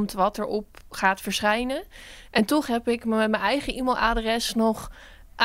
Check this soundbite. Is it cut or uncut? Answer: uncut